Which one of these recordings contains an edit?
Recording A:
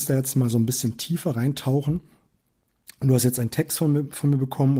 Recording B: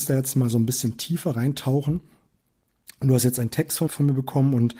B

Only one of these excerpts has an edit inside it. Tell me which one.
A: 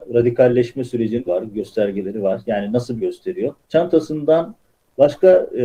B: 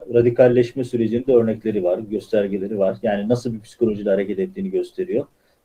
A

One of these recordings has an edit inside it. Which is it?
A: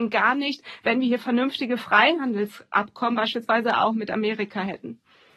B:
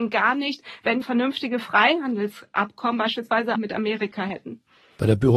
B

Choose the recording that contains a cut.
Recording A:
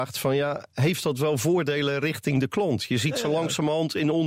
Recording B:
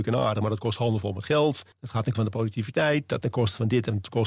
B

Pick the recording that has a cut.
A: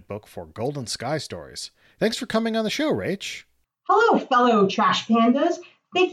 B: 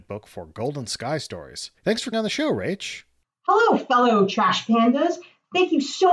B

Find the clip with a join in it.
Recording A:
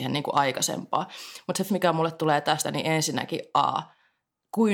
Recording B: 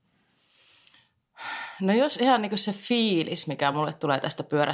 A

